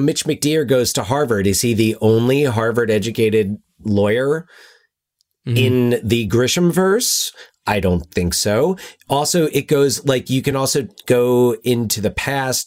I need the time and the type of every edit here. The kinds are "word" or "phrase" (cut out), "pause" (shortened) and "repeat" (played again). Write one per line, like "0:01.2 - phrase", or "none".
none

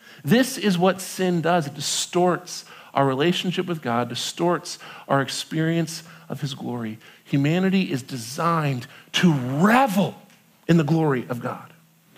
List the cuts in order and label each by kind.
none

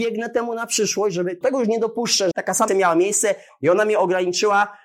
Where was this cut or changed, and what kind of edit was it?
0:01.4 - word
0:02.3 - word
0:02.7 - word

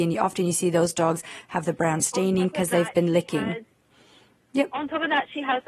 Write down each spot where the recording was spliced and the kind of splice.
none

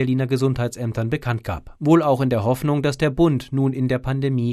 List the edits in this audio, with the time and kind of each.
none

